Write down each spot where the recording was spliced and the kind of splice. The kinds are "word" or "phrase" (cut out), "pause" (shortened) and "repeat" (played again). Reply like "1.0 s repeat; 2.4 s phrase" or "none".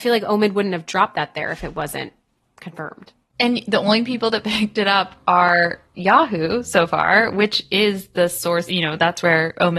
8.7 s word